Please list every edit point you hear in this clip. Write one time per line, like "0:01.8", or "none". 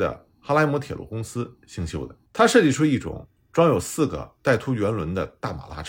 0:02.3